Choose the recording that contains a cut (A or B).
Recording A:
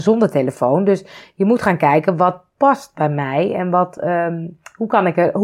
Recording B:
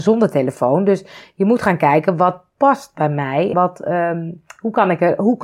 B